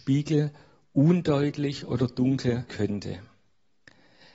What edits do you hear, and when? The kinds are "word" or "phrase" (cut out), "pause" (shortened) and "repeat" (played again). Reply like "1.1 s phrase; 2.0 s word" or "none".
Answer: 2.7 s word